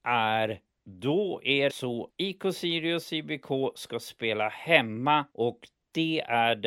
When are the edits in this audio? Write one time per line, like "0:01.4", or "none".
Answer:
0:01.7
0:02.1
0:05.3